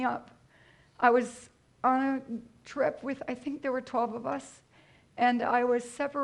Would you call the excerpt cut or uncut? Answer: uncut